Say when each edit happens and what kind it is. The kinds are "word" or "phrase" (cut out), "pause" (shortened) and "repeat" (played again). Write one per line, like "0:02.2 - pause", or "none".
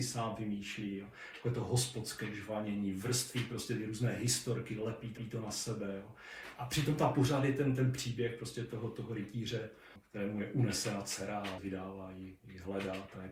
0:05.2 - repeat
0:11.6 - phrase